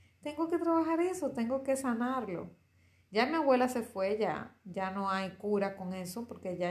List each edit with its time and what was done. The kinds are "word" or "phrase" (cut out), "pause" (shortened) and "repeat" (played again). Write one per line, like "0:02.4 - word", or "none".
none